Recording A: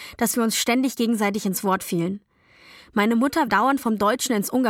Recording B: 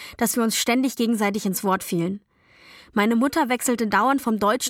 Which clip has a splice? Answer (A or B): A